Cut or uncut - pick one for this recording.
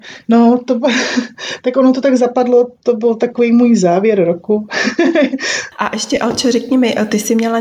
uncut